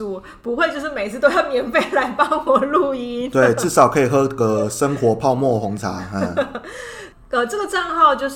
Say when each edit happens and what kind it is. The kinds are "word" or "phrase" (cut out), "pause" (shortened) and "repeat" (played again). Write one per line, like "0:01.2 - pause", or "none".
none